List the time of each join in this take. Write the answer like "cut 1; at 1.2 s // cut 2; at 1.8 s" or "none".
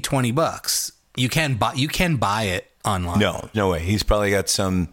cut 1; at 2.8 s // cut 2; at 3.5 s